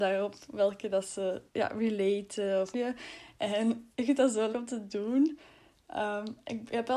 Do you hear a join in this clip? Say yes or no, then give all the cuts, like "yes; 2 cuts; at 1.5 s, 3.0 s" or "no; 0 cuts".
yes; 4 cuts; at 1.5 s, 2.7 s, 3.9 s, 4.5 s